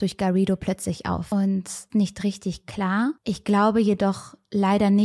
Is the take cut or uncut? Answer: cut